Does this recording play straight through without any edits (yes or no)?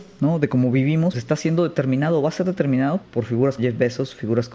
no